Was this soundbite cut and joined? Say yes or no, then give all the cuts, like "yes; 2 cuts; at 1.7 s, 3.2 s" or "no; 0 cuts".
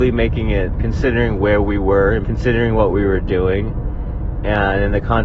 yes; 1 cut; at 2.2 s